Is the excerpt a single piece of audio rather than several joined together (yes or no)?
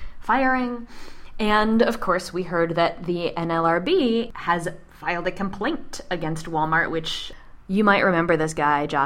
yes